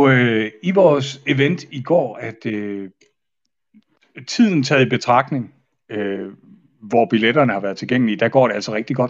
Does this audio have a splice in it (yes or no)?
yes